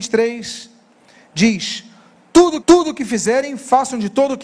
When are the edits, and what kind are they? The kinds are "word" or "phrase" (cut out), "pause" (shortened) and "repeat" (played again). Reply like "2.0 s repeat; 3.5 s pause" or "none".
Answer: 2.6 s repeat